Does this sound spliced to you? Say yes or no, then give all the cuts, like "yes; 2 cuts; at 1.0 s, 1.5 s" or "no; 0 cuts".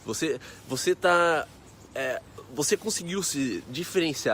no; 0 cuts